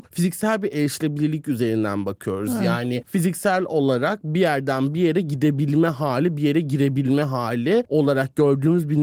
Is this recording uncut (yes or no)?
yes